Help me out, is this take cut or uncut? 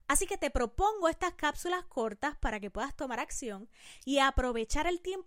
uncut